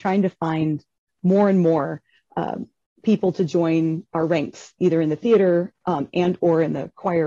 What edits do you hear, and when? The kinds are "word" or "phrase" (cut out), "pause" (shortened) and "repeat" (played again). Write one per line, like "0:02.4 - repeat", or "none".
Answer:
none